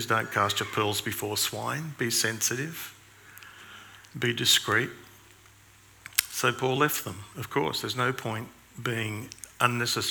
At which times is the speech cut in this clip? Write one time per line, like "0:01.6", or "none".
none